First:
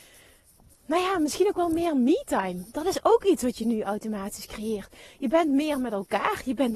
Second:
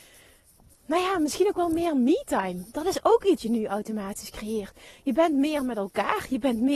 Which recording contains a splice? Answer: second; 1 cut; at 3.4 s

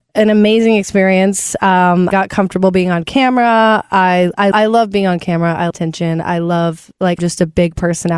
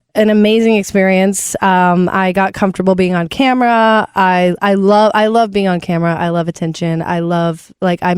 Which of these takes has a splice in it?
first; 4 cuts; at 2.1 s, 4.5 s, 5.7 s, 7.2 s

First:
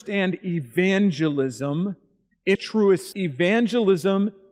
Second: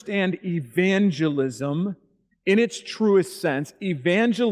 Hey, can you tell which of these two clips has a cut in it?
first; 2 cuts; at 2.5 s, 3.1 s

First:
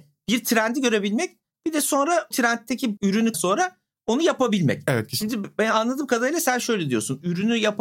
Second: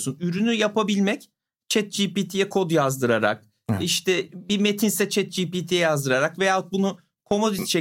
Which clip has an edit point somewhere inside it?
first; 3 cuts; at 2.3 s, 3.0 s, 3.3 s

